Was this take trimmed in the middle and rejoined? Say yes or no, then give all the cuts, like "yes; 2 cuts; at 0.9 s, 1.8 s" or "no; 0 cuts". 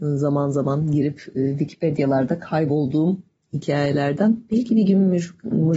no; 0 cuts